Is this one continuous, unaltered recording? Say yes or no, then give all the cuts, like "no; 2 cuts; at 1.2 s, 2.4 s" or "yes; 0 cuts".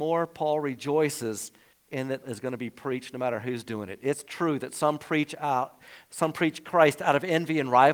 no; 2 cuts; at 1.7 s, 2.2 s